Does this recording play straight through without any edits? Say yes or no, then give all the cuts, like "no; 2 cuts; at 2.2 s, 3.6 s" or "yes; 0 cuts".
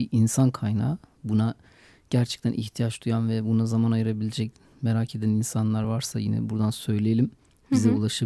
yes; 0 cuts